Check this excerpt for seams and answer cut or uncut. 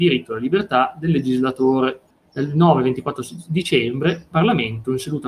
cut